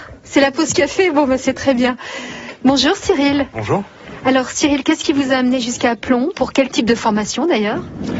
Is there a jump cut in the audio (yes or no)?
no